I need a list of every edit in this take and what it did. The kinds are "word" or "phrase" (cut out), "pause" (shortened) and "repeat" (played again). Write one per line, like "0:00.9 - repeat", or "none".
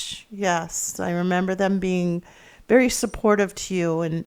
none